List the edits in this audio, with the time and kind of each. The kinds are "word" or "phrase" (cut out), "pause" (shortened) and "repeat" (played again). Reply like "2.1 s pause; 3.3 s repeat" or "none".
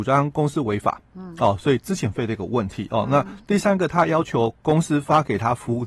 none